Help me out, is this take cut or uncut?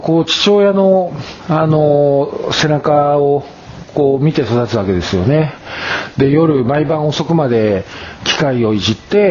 uncut